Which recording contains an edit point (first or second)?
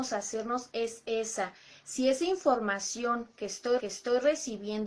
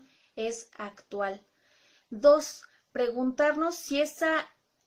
first